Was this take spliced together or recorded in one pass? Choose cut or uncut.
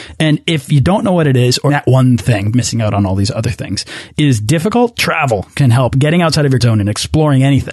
cut